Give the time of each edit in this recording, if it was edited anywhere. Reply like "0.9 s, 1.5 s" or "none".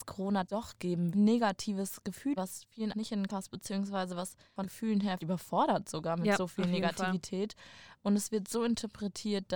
1.1 s, 2.4 s, 2.9 s, 3.3 s, 4.6 s, 5.2 s